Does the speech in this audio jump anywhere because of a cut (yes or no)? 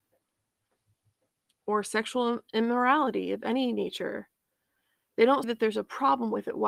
yes